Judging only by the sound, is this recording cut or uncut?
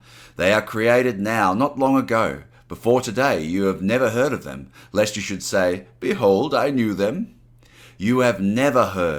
uncut